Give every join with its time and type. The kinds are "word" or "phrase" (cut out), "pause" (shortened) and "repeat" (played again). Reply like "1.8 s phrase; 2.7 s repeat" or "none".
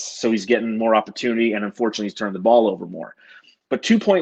none